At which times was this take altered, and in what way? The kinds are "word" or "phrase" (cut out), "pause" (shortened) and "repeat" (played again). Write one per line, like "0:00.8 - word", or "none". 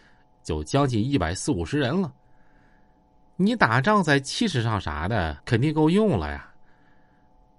0:05.4 - pause

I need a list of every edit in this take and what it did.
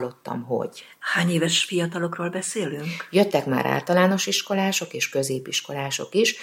none

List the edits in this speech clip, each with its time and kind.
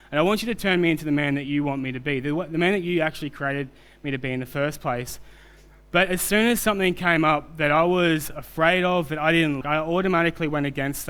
0:09.6 - word

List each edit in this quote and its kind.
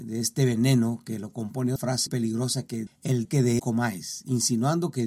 0:01.8 - word
0:02.1 - word
0:02.9 - word
0:03.2 - word
0:03.6 - word

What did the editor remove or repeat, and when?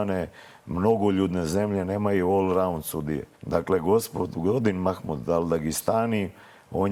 0:03.3 - pause

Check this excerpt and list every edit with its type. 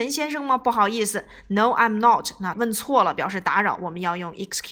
0:02.5 - word

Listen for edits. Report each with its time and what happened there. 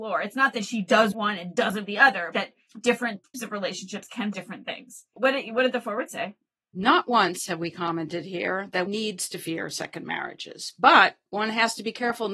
0:01.1 - word
0:01.9 - word
0:02.3 - word
0:03.3 - word
0:04.3 - word
0:05.2 - word
0:08.9 - word

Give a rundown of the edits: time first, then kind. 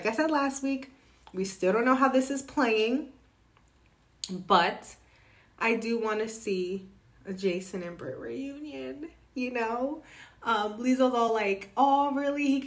none

